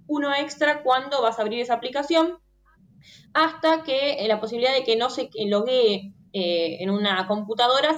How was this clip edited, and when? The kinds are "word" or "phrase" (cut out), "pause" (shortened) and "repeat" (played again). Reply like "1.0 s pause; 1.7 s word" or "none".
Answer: none

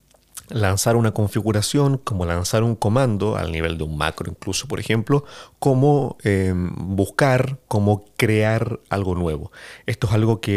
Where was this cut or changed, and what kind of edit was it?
none

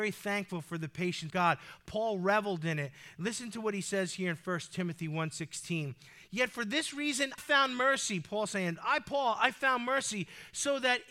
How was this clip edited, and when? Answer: 1.3 s word; 7.4 s word

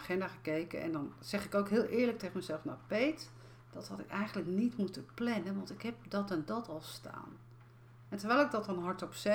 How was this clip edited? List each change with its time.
3.6 s pause

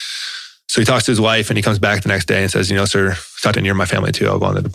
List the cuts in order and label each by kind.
3.5 s phrase

